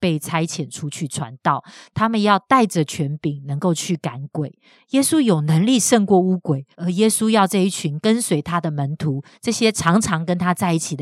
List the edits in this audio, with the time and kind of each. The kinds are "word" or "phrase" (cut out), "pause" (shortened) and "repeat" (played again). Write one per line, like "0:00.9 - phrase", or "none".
0:06.7 - pause